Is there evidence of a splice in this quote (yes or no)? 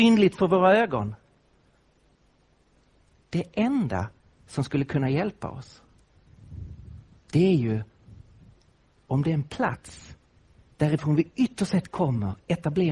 no